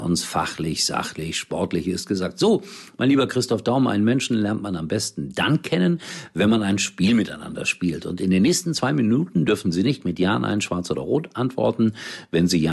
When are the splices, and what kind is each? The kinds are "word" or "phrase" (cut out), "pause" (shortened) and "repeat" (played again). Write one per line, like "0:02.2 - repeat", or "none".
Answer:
none